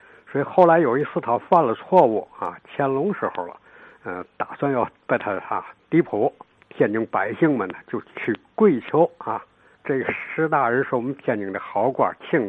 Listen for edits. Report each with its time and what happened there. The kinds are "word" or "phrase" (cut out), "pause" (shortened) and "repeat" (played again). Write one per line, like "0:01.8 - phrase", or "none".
none